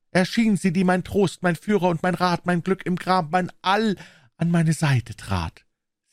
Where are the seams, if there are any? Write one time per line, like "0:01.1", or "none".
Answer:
none